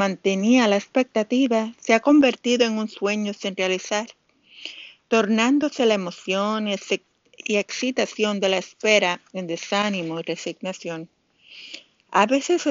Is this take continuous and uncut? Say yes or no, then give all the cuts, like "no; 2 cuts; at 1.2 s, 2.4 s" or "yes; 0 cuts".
yes; 0 cuts